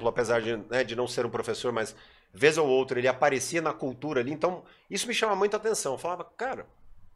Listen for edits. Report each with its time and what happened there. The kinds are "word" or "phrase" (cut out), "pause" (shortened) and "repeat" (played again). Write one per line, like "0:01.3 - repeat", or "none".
none